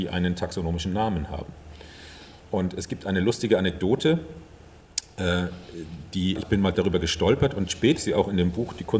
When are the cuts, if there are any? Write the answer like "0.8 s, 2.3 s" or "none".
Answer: 6.4 s, 6.7 s, 8.0 s